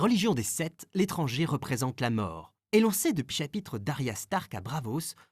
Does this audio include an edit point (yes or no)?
yes